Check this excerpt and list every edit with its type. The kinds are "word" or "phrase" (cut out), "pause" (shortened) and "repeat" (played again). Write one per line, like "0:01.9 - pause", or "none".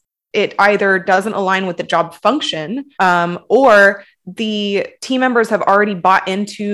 0:02.9 - pause
0:05.0 - pause